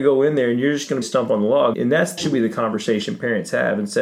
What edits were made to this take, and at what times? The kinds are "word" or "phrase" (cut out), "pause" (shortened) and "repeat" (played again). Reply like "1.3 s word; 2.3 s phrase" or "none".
1.0 s phrase; 1.7 s word; 2.2 s word

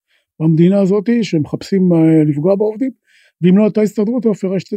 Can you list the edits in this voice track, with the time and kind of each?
none

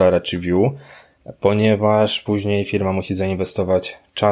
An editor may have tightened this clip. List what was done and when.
none

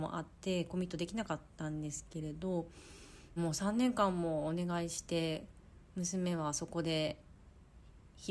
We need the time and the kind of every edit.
3.4 s phrase

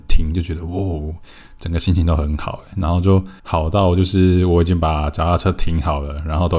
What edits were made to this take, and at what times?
3.4 s pause

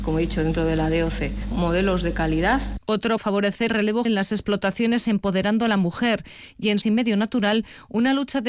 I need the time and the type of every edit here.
1.5 s word; 3.2 s word; 3.7 s word; 4.0 s word; 5.0 s word; 6.8 s word

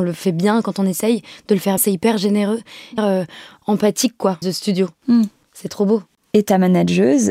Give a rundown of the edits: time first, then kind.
1.8 s word; 3.0 s phrase; 4.4 s phrase; 6.2 s pause

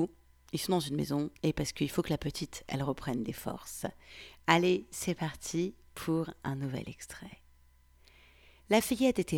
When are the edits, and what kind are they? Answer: 1.4 s pause

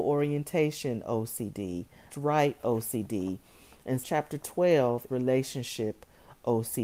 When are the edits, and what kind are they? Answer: 2.1 s word; 4.0 s word; 5.1 s word

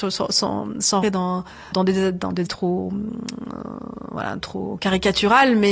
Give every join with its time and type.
1.0 s word; 1.7 s word; 2.5 s word; 4.4 s word

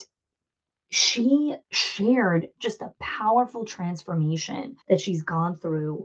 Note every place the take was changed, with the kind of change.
1.6 s pause; 4.8 s pause

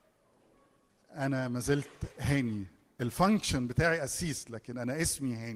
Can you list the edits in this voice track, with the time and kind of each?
none

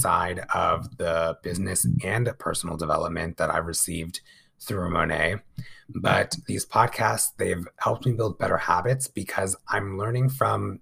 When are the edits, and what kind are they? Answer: none

